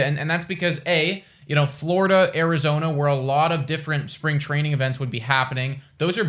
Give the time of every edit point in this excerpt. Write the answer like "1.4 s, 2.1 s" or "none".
none